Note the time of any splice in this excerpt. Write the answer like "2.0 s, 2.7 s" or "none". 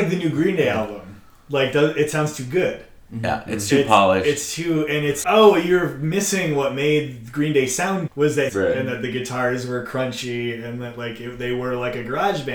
5.2 s, 8.1 s, 8.5 s